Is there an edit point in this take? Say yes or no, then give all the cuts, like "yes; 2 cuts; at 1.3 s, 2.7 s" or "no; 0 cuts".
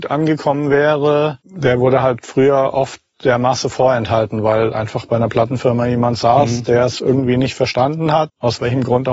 no; 0 cuts